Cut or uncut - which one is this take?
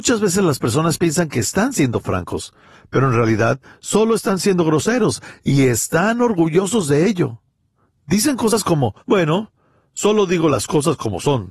cut